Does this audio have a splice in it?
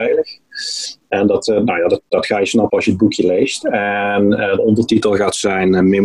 no; 0 cuts

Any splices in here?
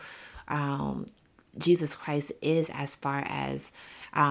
no; 0 cuts

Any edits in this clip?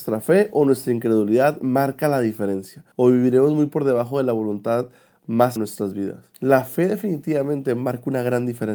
yes; 3 cuts; at 2.9 s, 5.6 s, 6.3 s

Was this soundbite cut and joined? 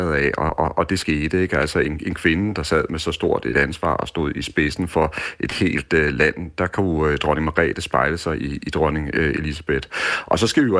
no; 0 cuts

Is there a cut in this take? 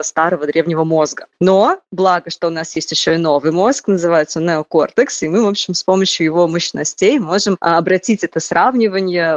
no; 0 cuts

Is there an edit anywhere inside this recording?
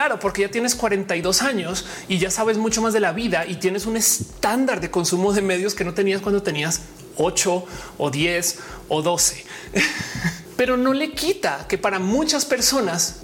no; 0 cuts

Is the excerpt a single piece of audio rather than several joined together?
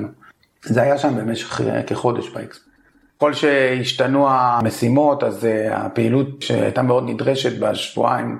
yes; 0 cuts

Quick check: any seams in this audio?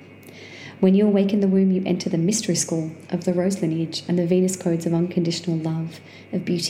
no; 0 cuts

